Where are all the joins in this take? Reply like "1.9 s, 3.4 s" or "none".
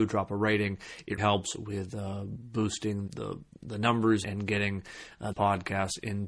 1.2 s, 3.1 s, 4.2 s, 5.3 s